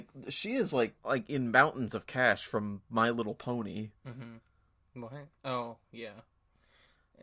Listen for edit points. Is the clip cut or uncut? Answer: cut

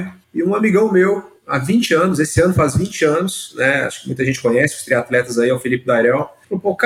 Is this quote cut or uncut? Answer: uncut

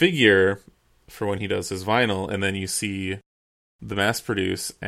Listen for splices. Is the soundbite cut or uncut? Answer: uncut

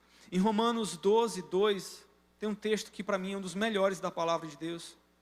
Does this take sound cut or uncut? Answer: uncut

